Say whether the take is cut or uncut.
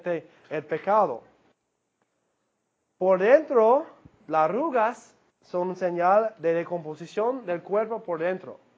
uncut